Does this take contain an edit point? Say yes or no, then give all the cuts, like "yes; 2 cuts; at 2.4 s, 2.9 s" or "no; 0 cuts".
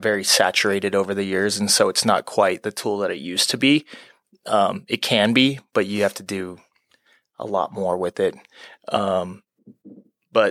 no; 0 cuts